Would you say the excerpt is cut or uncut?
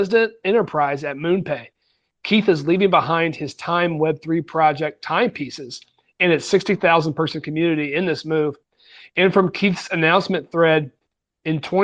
uncut